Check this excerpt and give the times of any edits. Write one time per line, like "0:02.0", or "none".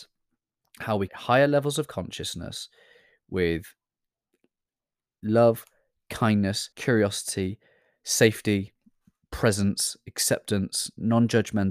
0:01.1
0:06.7